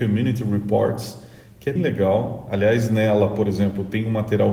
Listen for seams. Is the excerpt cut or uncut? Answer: cut